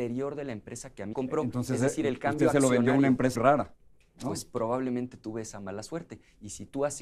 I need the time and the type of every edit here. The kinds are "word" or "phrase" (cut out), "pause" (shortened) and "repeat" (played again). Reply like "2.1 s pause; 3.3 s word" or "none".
1.1 s word; 3.4 s word